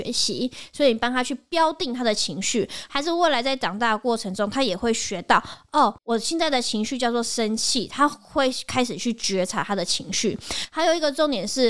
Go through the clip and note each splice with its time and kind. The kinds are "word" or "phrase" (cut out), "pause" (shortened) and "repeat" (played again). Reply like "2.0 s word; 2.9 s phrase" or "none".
6.0 s pause